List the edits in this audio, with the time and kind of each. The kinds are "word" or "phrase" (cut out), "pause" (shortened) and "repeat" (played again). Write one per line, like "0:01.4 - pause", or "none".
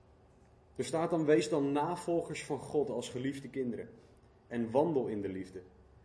none